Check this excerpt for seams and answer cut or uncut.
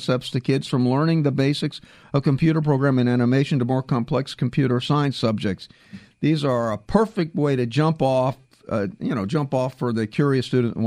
uncut